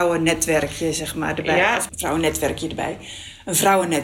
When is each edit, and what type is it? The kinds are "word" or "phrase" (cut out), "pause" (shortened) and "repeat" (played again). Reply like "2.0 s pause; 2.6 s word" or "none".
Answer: 1.9 s word